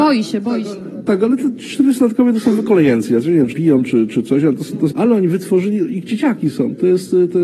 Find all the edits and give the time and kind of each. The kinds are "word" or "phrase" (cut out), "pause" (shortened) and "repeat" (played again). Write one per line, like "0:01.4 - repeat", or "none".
0:03.5 - word
0:04.9 - phrase